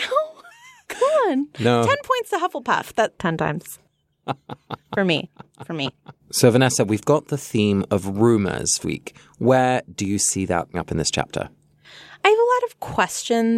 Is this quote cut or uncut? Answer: cut